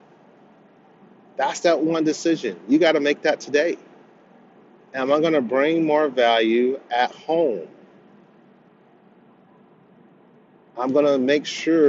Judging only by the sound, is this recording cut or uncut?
uncut